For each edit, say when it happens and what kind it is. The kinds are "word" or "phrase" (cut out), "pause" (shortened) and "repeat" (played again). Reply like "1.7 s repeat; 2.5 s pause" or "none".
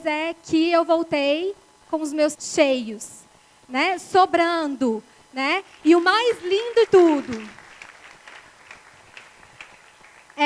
2.3 s word; 6.9 s word